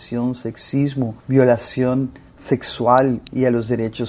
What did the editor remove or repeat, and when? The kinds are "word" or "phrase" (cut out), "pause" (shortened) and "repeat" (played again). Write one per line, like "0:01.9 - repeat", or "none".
0:01.2 - pause